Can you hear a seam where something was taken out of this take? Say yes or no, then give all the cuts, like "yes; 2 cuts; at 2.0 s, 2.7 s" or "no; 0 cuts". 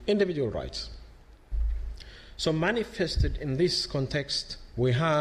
no; 0 cuts